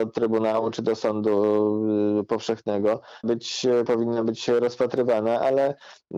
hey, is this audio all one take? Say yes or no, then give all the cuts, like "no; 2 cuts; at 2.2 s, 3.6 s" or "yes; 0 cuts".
no; 1 cut; at 3.2 s